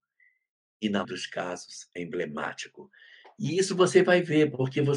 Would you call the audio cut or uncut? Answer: cut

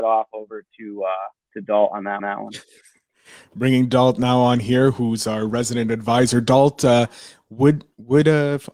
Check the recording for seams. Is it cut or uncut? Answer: cut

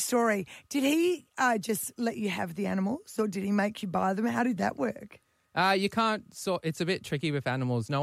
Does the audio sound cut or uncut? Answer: uncut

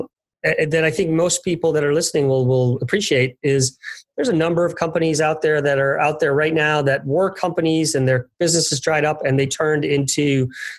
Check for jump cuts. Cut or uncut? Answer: uncut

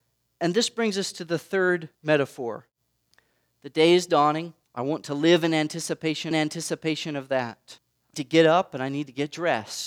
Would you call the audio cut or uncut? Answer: cut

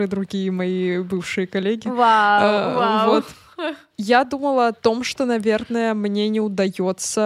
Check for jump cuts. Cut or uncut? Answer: uncut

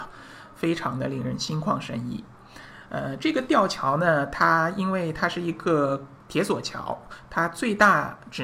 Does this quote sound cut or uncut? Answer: cut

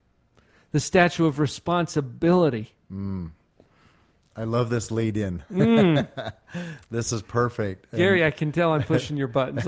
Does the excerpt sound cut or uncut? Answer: uncut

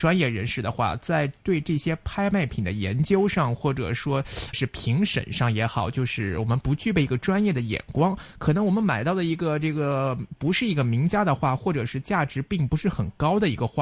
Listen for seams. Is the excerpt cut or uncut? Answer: cut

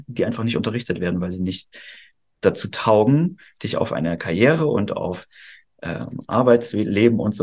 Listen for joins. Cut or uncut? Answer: uncut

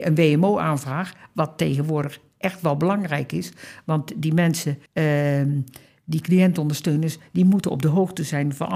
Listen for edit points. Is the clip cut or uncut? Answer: cut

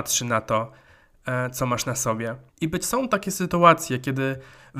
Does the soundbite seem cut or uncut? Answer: cut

